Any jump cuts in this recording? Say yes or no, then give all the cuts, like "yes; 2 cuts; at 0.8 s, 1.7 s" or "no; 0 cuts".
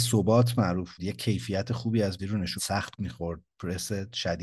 yes; 4 cuts; at 1.0 s, 2.2 s, 2.6 s, 3.0 s